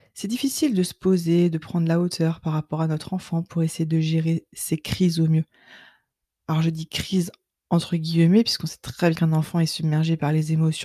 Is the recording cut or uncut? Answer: cut